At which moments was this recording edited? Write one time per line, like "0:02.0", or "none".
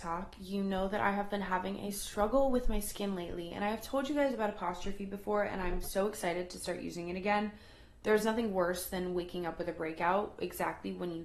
none